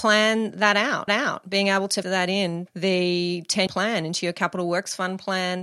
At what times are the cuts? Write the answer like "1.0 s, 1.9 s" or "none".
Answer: 1.1 s, 2.0 s, 2.7 s, 3.7 s